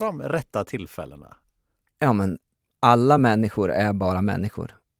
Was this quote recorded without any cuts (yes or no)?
yes